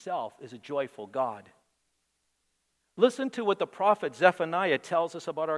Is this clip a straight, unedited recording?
yes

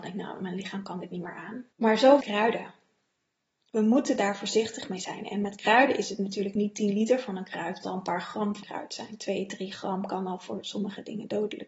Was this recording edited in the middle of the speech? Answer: yes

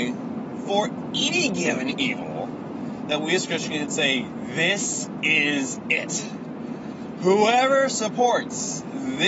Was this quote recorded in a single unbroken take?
yes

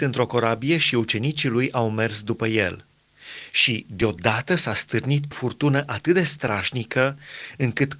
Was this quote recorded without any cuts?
no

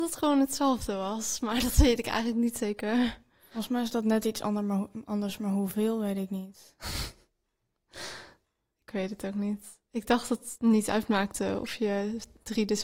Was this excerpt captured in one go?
yes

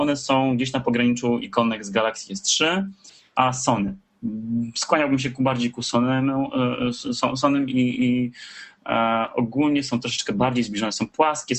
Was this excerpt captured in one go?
yes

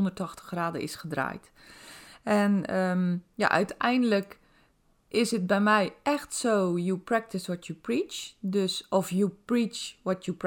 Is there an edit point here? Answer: no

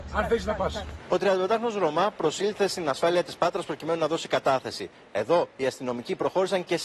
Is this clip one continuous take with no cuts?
yes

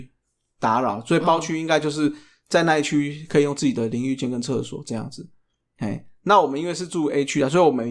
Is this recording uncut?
yes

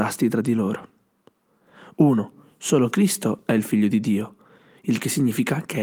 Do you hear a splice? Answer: no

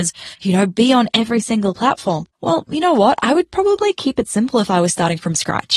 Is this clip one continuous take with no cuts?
no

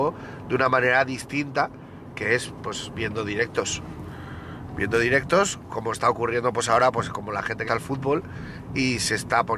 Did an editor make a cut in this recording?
yes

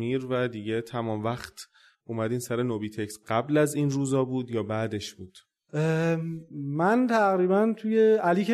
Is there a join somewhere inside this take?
no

